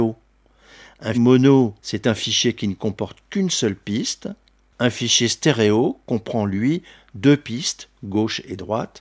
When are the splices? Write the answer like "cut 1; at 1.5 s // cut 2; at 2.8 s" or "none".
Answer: cut 1; at 1.1 s